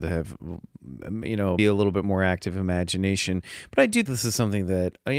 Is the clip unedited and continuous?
no; 2 cuts; at 1.6 s, 4.1 s

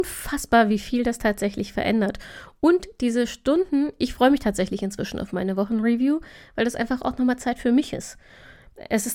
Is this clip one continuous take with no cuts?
yes; 0 cuts

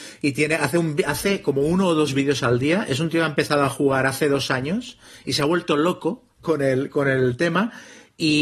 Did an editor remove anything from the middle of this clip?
no; 0 cuts

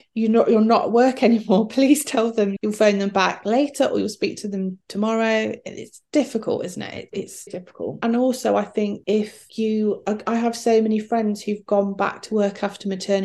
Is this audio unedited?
no; 2 cuts; at 2.6 s, 7.5 s

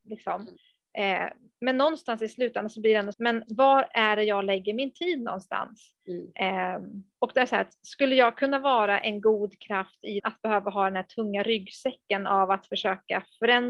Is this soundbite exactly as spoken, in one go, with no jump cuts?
no; 2 cuts; at 3.1 s, 10.2 s

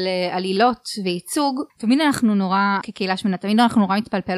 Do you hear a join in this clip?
yes; 2 cuts; at 1.7 s, 2.8 s

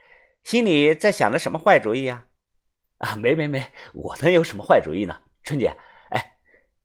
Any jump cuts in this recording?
no; 0 cuts

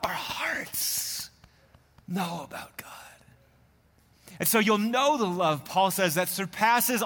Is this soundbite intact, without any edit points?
yes; 0 cuts

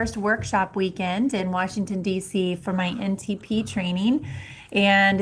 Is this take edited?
no; 0 cuts

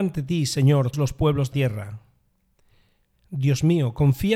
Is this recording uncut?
no; 2 cuts; at 0.9 s, 1.5 s

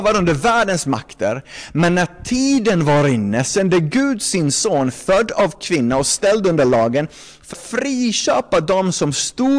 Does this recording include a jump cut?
yes; 1 cut; at 7.5 s

